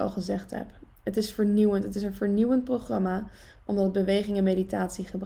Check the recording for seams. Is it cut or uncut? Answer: uncut